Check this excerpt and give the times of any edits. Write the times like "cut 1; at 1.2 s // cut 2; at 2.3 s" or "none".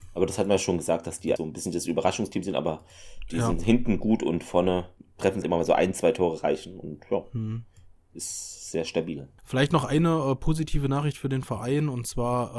cut 1; at 1.4 s // cut 2; at 5.4 s